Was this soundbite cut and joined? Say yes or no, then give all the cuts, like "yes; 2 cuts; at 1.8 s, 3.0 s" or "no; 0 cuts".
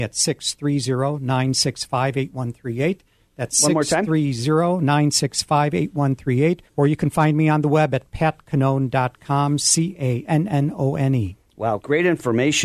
yes; 1 cut; at 6.7 s